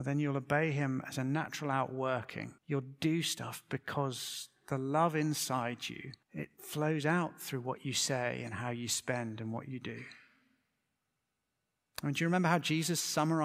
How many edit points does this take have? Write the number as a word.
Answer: two